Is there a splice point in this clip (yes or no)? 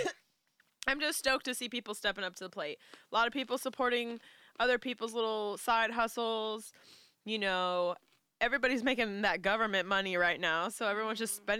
no